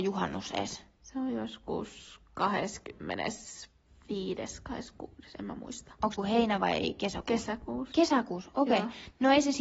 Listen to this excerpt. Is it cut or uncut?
cut